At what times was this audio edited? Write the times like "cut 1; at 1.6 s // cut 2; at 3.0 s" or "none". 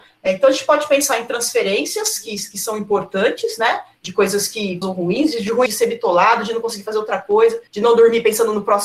cut 1; at 4.8 s // cut 2; at 5.7 s // cut 3; at 7.7 s